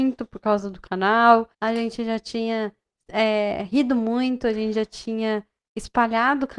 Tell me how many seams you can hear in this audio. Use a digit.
1